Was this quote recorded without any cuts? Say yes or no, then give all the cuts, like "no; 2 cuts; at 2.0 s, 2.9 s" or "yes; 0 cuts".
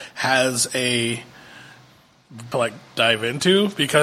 no; 1 cut; at 2.5 s